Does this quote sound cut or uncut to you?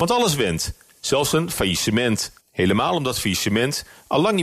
cut